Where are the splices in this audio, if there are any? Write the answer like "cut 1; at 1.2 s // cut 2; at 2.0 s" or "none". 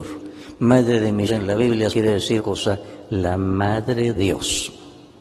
cut 1; at 1.3 s // cut 2; at 1.9 s // cut 3; at 2.4 s // cut 4; at 4.1 s